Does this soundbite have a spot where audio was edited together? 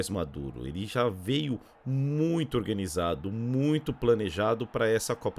no; 0 cuts

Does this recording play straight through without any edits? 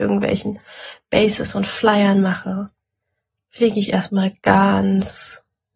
yes; 0 cuts

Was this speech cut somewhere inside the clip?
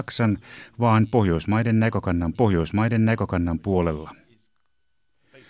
yes; 1 cut; at 2.3 s

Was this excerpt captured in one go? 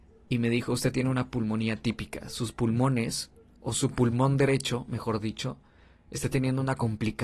yes; 0 cuts

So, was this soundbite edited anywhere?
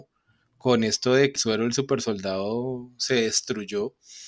yes; 1 cut; at 1.4 s

